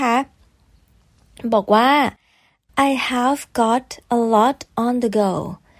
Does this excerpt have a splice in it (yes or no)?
no